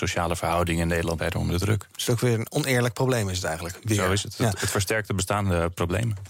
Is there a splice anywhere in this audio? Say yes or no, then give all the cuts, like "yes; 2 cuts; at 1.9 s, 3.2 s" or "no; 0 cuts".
yes; 1 cut; at 1.2 s